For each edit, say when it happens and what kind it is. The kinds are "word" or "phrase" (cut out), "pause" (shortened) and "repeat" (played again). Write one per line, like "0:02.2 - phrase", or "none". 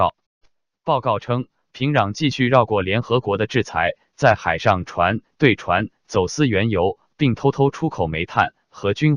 none